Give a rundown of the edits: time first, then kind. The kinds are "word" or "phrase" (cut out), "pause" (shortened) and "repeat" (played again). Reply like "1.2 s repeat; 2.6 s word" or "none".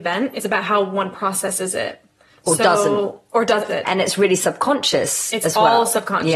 3.7 s phrase